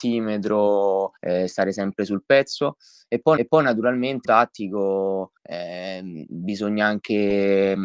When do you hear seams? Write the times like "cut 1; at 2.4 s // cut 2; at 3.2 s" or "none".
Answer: cut 1; at 1.2 s // cut 2; at 3.4 s // cut 3; at 4.2 s // cut 4; at 5.4 s